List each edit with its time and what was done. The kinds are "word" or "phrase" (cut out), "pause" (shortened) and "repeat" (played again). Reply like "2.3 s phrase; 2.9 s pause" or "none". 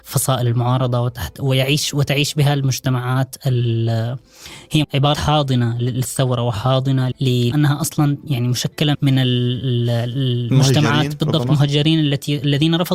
4.8 s word; 5.1 s phrase; 7.1 s word; 7.5 s phrase; 8.9 s word